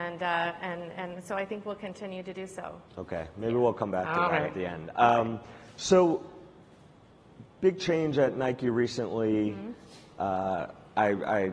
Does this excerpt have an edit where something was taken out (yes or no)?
yes